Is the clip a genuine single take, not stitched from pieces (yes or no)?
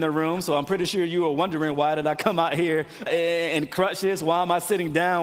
no